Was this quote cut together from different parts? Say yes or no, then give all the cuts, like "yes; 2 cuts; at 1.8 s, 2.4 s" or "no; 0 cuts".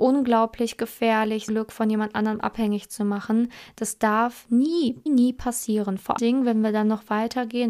yes; 3 cuts; at 1.5 s, 5.1 s, 6.2 s